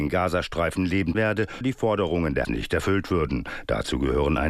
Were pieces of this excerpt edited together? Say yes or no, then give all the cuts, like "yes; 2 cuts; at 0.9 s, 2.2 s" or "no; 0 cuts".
yes; 3 cuts; at 1.1 s, 1.6 s, 2.4 s